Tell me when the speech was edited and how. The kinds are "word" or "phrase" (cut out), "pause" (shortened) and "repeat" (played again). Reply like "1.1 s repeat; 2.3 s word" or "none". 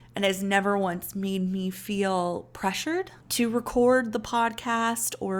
3.2 s pause